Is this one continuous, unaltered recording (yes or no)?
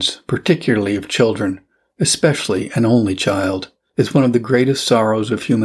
yes